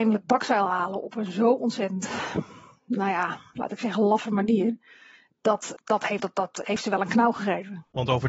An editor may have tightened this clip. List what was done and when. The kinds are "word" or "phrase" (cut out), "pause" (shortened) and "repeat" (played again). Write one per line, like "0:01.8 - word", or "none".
0:05.8 - word
0:06.2 - word
0:06.7 - word